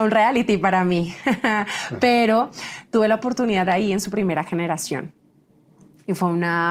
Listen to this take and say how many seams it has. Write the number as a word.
one